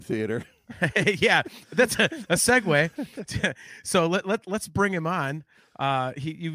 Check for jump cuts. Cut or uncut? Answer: uncut